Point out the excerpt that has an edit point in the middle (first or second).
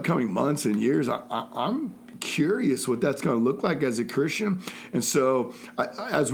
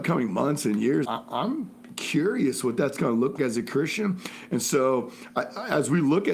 second